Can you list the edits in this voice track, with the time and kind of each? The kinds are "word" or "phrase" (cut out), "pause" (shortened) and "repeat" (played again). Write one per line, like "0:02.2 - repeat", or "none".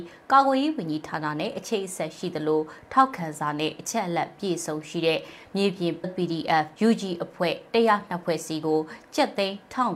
0:06.0 - word
0:06.7 - pause

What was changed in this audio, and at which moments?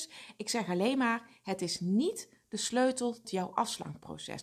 0:03.2 - word

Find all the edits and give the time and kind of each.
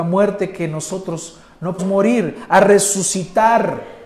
0:01.8 - word

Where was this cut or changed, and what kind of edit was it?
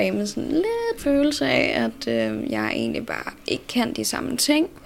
0:01.0 - word

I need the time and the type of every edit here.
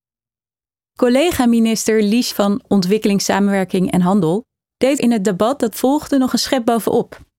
0:02.3 - word
0:05.0 - word
0:05.7 - word

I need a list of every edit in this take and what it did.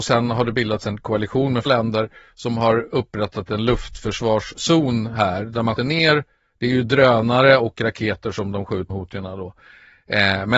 0:01.7 - word
0:05.8 - word
0:08.9 - word

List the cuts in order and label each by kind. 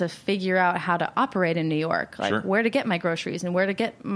none

